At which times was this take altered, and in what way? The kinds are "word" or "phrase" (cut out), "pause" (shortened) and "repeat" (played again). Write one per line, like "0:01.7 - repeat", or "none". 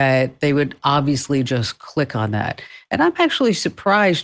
none

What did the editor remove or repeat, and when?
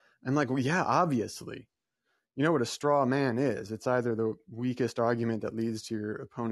none

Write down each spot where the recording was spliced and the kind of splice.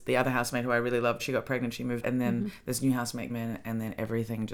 0:01.2 - word
0:02.0 - word
0:03.3 - word

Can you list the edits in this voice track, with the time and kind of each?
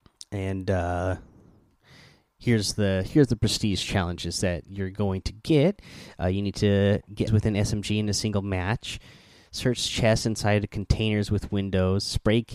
0:07.3 - word

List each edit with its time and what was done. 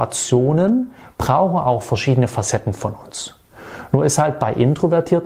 none

